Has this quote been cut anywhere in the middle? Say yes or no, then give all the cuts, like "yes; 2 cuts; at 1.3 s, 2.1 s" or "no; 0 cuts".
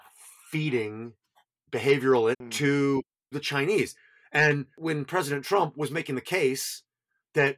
yes; 3 cuts; at 2.3 s, 3.3 s, 4.7 s